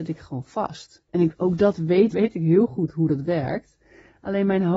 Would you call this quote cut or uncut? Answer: cut